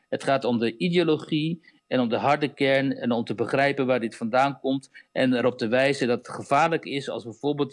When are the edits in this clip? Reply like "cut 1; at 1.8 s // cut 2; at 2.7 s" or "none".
none